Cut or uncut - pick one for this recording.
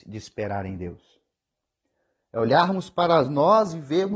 uncut